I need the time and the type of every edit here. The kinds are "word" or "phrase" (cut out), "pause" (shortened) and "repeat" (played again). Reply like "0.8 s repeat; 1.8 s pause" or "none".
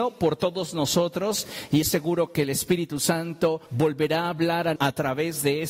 1.8 s word; 3.7 s pause; 4.8 s phrase